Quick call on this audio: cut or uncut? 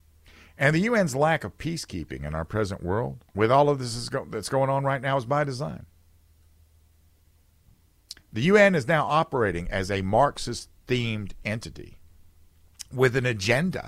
cut